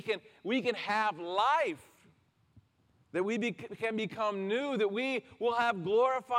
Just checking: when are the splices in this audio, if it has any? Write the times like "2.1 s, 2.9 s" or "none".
2.8 s